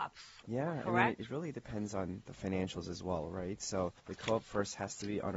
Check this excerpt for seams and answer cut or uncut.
cut